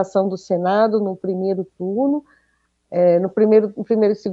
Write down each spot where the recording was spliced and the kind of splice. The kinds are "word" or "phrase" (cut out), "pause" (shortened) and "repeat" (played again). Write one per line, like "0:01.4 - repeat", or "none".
none